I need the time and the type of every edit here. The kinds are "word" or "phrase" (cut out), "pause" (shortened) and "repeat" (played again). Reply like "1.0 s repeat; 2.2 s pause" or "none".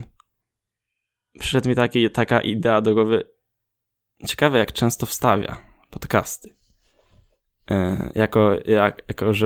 none